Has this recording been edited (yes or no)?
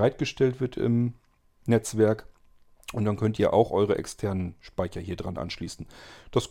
no